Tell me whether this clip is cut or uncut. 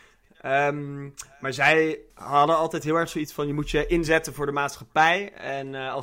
cut